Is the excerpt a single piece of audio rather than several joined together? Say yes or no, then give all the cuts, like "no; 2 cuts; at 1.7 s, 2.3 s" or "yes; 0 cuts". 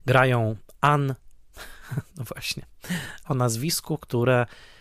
no; 1 cut; at 3.2 s